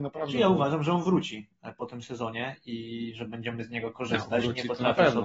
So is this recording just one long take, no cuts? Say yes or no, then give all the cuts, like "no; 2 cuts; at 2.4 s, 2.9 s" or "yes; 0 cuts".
yes; 0 cuts